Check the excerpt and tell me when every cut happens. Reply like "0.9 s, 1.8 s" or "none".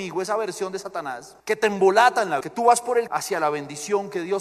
1.4 s, 2.4 s, 3.1 s